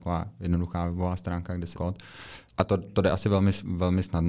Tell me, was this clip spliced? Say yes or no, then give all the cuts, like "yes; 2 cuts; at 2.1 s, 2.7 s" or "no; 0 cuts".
yes; 2 cuts; at 1.7 s, 2.5 s